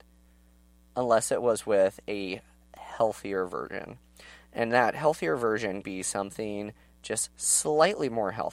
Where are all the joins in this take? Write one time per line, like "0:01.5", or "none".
0:05.8